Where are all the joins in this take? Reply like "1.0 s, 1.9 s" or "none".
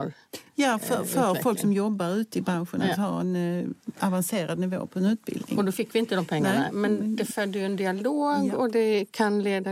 none